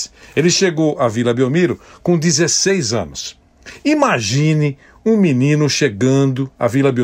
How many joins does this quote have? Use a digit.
0